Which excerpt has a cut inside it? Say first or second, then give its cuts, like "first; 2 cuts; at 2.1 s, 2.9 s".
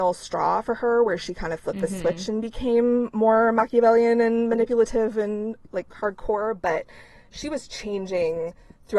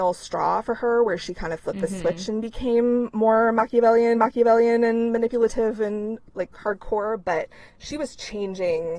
second; 2 cuts; at 4.2 s, 7.7 s